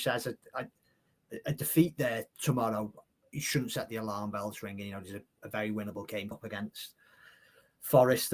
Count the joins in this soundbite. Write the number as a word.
two